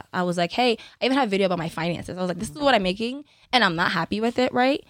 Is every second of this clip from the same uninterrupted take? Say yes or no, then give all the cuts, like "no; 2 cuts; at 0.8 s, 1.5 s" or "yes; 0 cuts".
yes; 0 cuts